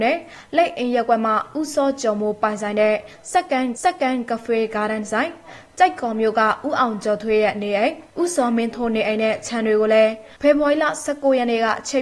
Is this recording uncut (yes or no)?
no